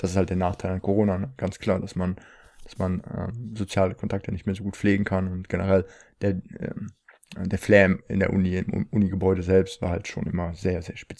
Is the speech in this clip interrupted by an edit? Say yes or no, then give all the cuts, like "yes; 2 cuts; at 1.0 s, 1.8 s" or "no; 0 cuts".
no; 0 cuts